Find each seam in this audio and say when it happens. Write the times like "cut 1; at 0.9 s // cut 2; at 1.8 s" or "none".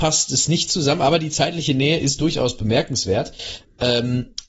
none